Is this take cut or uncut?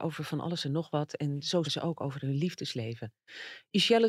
cut